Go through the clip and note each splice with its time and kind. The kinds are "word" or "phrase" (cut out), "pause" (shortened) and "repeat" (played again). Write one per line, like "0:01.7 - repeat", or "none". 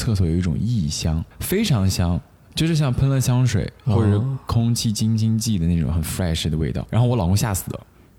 0:01.3 - pause